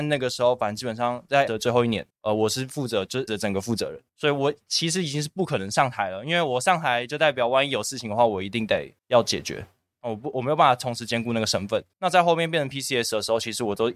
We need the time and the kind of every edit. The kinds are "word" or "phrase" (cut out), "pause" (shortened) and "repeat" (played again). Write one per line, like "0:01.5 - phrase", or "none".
0:01.5 - word
0:02.1 - pause
0:03.3 - word
0:04.1 - pause
0:09.0 - pause
0:11.9 - pause